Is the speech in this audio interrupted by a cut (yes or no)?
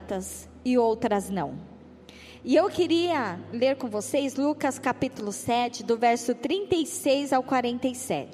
no